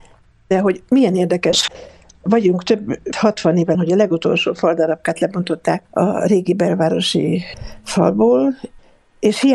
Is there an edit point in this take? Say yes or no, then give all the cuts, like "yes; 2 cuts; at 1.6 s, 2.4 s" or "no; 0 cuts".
yes; 4 cuts; at 1.7 s, 3.1 s, 3.7 s, 5.8 s